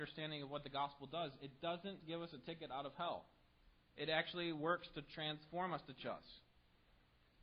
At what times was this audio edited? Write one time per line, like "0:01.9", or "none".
0:02.0
0:03.8
0:06.0